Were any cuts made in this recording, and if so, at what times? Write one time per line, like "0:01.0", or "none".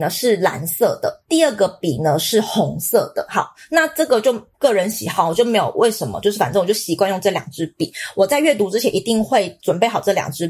0:01.2
0:04.5